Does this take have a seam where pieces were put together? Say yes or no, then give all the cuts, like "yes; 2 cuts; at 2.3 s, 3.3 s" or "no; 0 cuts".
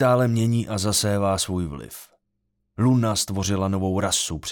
no; 0 cuts